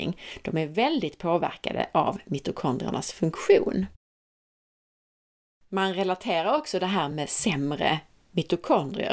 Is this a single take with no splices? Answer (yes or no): yes